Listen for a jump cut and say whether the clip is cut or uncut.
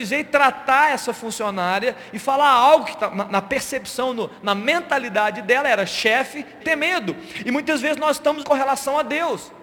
cut